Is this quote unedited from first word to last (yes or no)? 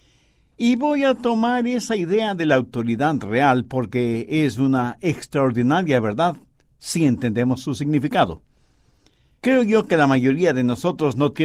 yes